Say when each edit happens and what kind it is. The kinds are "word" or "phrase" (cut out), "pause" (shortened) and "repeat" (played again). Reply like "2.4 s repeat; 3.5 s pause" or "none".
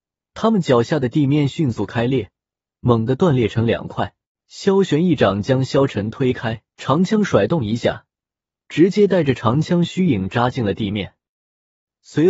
4.3 s pause; 6.7 s pause

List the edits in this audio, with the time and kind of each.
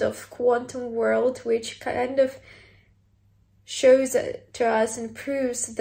none

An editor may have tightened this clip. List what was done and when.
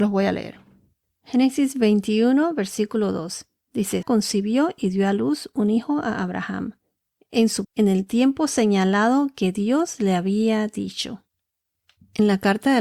4.0 s word; 7.6 s word

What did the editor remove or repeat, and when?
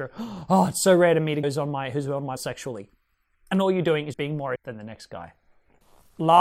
1.4 s word; 2.4 s word; 4.1 s word; 4.6 s word

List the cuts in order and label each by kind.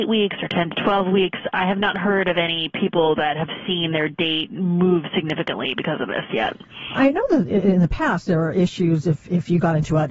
none

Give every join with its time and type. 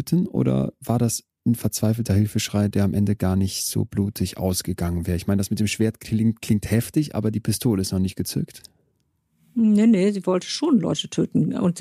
none

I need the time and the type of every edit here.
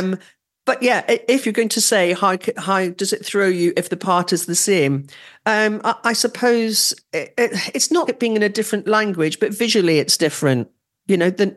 8.1 s word

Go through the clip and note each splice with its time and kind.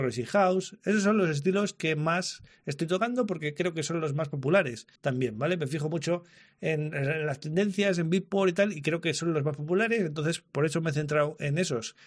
5.0 s pause

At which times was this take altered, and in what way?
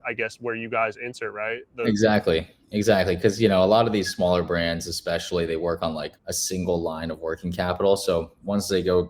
6.2 s pause

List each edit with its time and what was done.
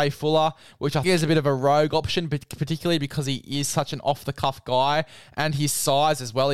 1.0 s word

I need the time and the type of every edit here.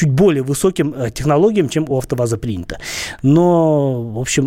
none

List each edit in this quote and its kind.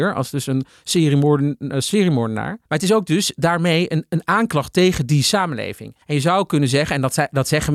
2.7 s pause; 6.0 s pause

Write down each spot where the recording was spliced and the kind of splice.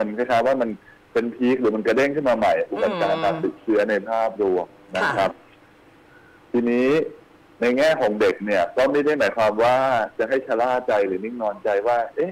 none

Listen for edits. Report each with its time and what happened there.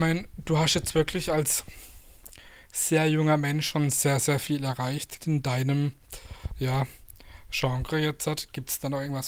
5.2 s word

